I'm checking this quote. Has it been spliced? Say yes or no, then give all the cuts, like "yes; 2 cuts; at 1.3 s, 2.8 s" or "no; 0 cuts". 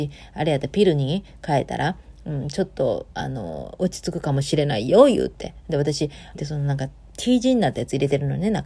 yes; 1 cut; at 6.3 s